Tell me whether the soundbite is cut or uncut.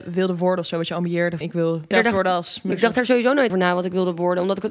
cut